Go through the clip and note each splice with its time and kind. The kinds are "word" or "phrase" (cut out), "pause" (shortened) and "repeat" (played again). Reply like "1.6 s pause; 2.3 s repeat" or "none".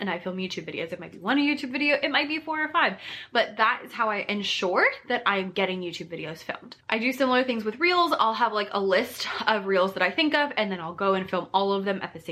6.8 s pause